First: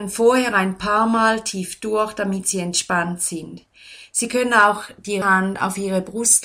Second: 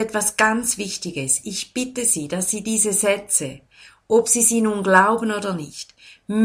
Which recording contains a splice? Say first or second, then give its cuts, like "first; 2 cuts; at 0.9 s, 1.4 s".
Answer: first; 1 cut; at 5.2 s